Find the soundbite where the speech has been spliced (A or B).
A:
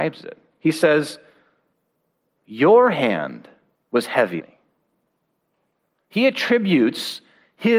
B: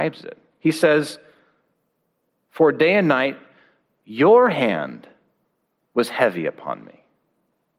A